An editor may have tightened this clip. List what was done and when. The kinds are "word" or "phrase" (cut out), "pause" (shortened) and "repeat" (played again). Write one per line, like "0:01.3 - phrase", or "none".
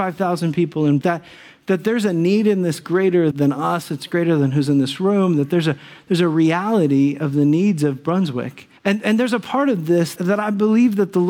0:01.0 - word
0:02.8 - phrase
0:03.3 - word
0:08.8 - pause
0:10.2 - word